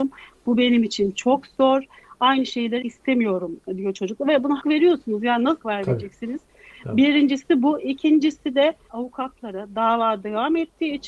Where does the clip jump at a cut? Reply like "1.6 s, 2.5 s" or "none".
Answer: 2.8 s, 4.6 s, 5.6 s, 8.9 s